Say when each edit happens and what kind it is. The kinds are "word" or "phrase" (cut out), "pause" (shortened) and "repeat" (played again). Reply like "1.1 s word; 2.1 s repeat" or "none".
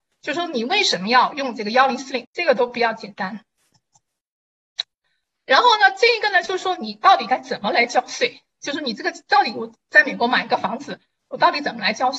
2.2 s phrase